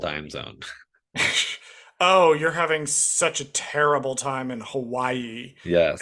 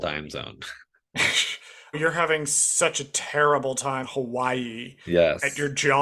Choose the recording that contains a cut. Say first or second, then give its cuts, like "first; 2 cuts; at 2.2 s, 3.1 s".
second; 2 cuts; at 1.9 s, 4.0 s